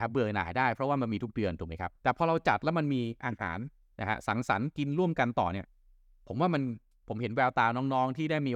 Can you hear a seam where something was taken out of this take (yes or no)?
yes